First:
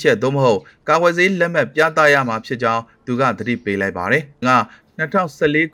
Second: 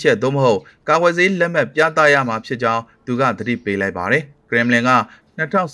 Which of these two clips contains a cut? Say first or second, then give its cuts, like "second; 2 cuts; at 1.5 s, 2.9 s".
first; 1 cut; at 4.4 s